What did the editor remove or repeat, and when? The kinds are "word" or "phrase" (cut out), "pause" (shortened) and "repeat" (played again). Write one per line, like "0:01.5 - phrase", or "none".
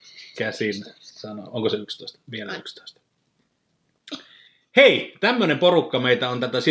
0:04.5 - pause